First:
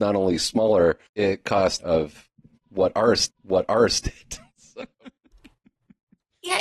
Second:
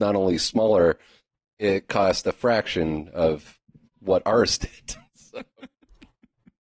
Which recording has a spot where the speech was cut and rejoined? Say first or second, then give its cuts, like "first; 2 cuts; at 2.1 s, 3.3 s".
first; 3 cuts; at 1.1 s, 1.8 s, 3.3 s